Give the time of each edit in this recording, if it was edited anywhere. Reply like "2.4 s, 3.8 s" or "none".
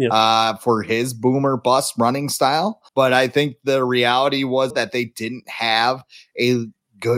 2.9 s, 4.7 s

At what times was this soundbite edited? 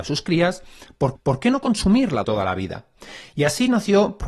1.1 s, 2.2 s

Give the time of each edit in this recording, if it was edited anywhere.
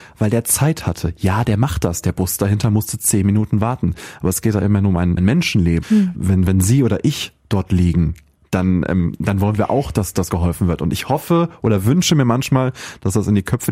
5.2 s, 5.8 s, 6.1 s, 10.3 s

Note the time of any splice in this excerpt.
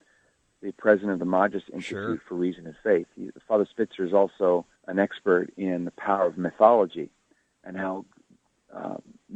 4.8 s

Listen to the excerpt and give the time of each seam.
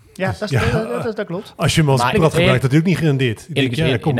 2.1 s

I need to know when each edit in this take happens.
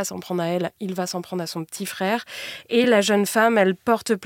none

